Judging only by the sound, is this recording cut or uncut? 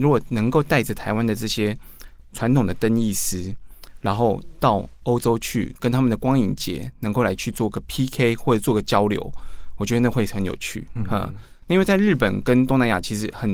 uncut